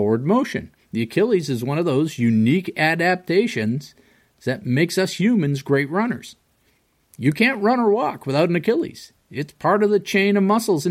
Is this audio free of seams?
yes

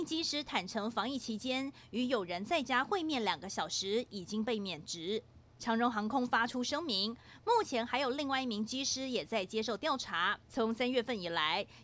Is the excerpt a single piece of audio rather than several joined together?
no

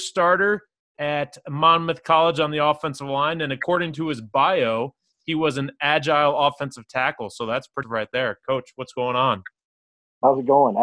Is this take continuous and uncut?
no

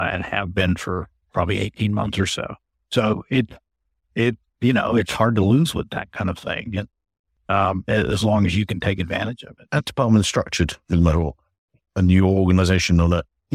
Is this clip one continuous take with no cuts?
no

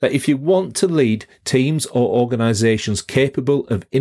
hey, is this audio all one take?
yes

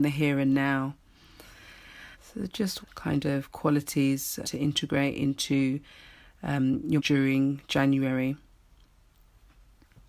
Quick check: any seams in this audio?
yes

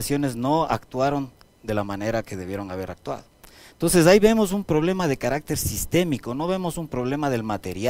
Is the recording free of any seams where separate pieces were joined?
yes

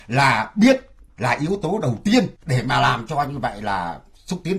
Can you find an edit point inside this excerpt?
yes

